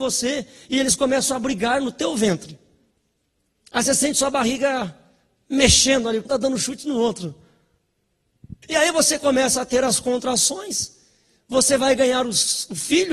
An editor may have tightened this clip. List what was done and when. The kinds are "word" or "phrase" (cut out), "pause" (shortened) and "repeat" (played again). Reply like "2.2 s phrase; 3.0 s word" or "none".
6.3 s word; 8.6 s pause